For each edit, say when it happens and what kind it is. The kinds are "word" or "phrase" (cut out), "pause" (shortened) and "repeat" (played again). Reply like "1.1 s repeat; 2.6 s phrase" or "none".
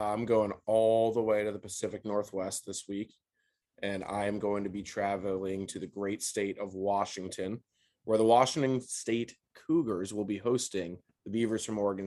none